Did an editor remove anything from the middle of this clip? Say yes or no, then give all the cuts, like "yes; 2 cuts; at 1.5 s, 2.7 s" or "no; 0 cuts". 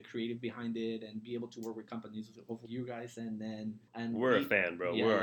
yes; 2 cuts; at 2.6 s, 3.9 s